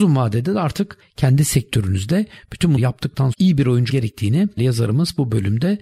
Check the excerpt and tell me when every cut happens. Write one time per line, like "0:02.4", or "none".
0:02.8
0:03.3
0:03.9
0:04.6